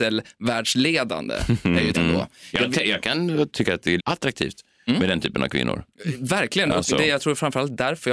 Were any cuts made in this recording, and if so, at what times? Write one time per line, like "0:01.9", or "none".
0:01.9
0:04.0